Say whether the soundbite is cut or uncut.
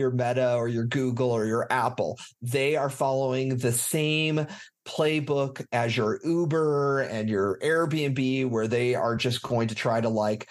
uncut